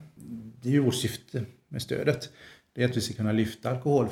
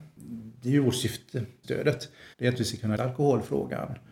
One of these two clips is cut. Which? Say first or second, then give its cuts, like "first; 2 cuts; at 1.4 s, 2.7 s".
second; 3 cuts; at 1.6 s, 2.3 s, 3.0 s